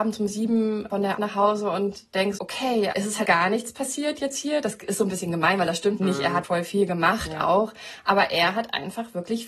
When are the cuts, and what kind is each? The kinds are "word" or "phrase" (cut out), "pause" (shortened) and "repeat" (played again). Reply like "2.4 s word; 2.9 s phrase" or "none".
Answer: 1.2 s word; 2.4 s word; 2.9 s word; 3.2 s word; 6.0 s word; 6.4 s word